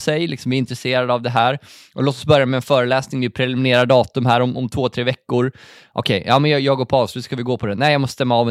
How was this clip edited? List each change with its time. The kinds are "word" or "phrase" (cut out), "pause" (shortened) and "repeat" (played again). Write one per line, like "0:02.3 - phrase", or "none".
none